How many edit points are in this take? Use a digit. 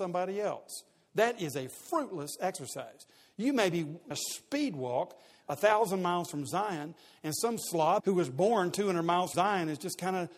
3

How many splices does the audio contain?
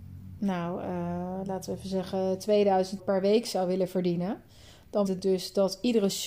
2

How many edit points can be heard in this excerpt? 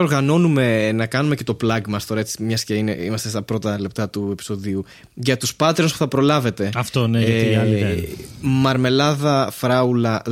0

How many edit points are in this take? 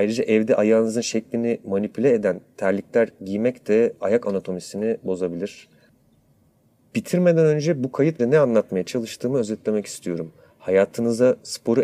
1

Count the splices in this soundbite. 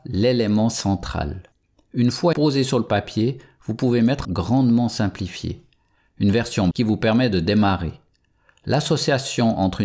3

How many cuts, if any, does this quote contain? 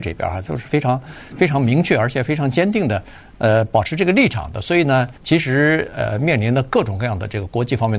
1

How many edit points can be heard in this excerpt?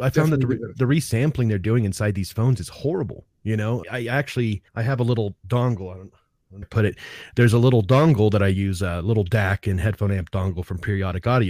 4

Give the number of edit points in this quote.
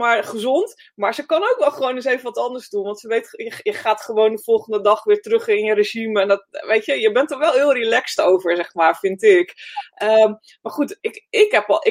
0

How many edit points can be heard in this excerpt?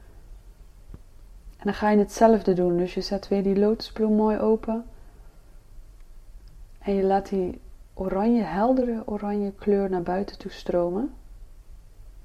0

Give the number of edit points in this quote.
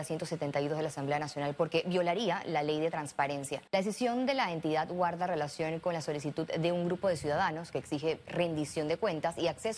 1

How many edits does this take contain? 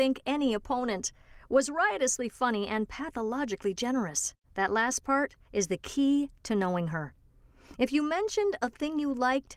2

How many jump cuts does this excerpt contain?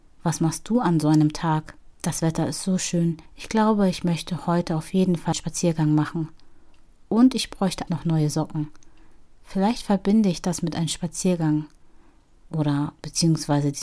4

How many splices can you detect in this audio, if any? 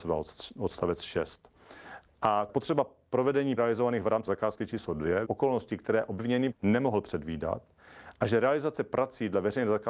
5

